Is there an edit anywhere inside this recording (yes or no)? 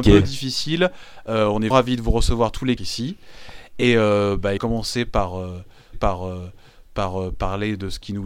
yes